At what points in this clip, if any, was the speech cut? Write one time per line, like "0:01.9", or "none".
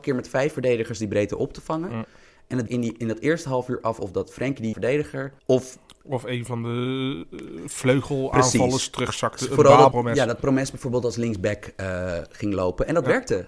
0:02.7
0:04.7
0:05.4
0:09.9